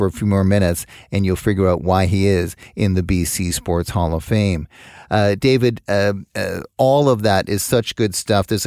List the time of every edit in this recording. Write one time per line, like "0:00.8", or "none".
none